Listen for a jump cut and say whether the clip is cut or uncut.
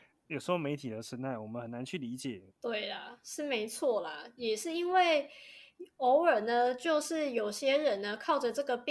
cut